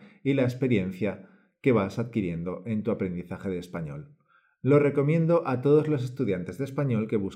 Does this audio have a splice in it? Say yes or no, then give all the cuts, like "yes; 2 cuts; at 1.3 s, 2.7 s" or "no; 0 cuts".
no; 0 cuts